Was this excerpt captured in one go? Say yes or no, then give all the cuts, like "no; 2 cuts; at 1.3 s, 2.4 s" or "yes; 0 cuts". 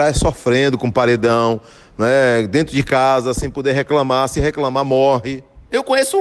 yes; 0 cuts